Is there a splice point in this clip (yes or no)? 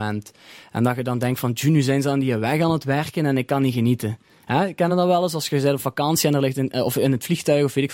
no